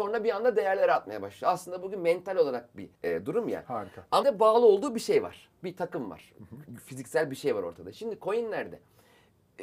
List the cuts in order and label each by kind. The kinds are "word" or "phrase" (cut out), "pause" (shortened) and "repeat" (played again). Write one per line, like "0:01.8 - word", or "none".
0:02.9 - pause
0:04.2 - word